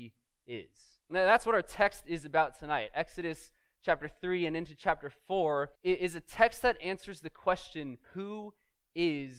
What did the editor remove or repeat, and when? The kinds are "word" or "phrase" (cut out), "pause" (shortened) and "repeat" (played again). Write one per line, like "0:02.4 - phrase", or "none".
0:01.0 - pause
0:05.7 - pause
0:08.0 - pause